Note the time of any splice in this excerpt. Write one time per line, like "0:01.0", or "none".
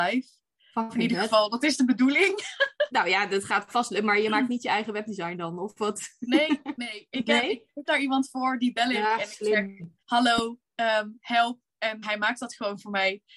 0:07.9
0:10.0
0:12.0